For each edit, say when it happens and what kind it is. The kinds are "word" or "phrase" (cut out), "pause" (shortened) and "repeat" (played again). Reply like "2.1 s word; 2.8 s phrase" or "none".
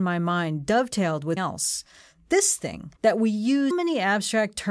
1.4 s word; 3.0 s pause; 3.7 s word